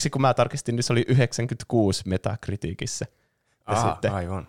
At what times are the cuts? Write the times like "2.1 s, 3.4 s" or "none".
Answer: none